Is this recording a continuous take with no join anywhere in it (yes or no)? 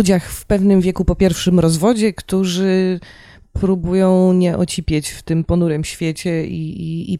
yes